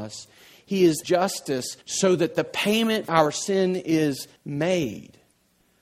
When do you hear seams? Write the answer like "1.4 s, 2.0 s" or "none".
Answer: 1.0 s, 1.8 s, 3.1 s, 4.4 s